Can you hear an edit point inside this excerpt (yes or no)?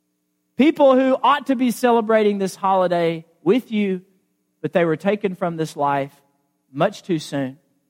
no